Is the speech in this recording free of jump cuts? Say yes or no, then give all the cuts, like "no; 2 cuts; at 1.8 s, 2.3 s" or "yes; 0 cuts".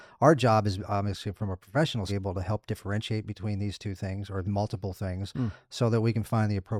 no; 2 cuts; at 2.1 s, 4.4 s